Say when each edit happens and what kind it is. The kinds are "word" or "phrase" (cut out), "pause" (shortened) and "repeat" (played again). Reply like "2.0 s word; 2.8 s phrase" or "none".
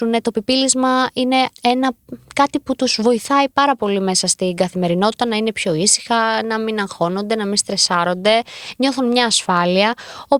1.5 s pause